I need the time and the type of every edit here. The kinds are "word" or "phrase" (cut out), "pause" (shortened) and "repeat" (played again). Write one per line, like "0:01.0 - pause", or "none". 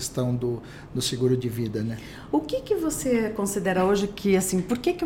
none